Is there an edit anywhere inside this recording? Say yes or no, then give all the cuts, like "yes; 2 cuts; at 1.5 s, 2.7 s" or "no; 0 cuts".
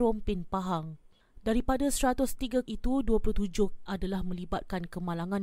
yes; 2 cuts; at 2.7 s, 3.9 s